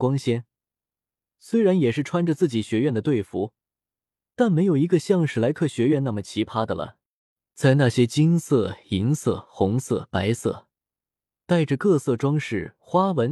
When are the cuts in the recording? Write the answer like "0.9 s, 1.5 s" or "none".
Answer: none